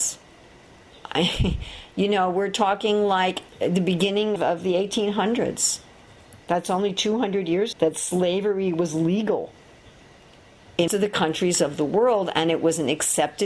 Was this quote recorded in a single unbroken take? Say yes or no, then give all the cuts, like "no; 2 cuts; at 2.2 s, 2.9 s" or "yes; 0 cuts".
no; 5 cuts; at 3.5 s, 4.4 s, 6.4 s, 7.7 s, 10.9 s